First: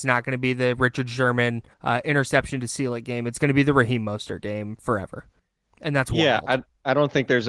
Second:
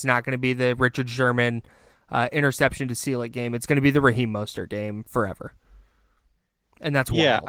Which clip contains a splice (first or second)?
first